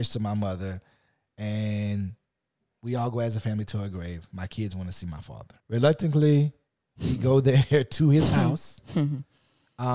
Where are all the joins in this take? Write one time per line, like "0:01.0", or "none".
0:05.6